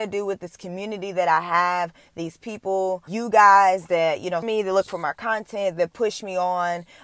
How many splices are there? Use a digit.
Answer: 2